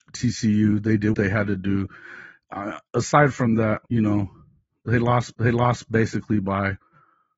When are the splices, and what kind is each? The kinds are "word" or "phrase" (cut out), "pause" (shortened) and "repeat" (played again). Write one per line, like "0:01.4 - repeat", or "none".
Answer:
0:01.1 - word
0:03.9 - pause
0:05.3 - repeat